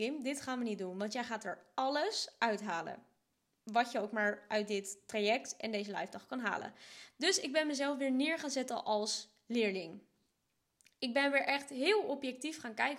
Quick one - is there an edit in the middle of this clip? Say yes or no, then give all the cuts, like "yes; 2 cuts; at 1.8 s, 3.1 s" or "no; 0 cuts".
no; 0 cuts